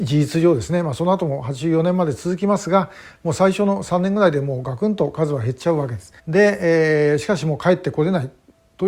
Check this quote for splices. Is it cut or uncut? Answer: cut